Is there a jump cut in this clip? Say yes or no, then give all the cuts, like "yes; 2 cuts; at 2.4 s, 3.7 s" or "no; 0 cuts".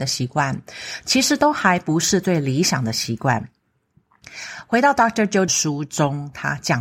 yes; 1 cut; at 5.5 s